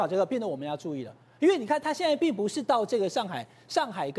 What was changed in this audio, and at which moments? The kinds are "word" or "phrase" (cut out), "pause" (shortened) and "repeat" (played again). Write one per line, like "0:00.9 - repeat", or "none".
none